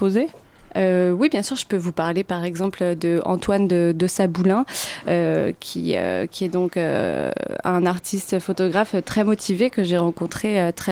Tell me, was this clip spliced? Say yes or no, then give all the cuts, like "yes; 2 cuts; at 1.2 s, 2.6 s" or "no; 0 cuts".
no; 0 cuts